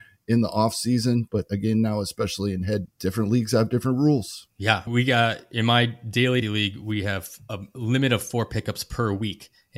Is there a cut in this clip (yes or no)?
yes